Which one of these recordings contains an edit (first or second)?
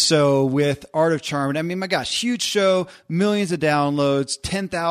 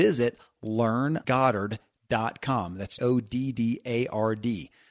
second